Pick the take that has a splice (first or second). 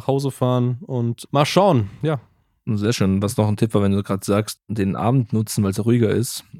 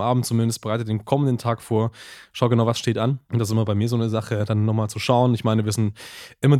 second